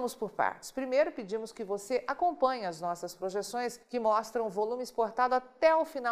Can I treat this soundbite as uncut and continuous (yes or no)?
no